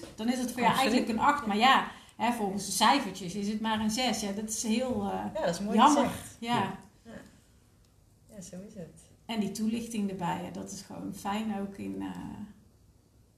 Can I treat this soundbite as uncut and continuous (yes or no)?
yes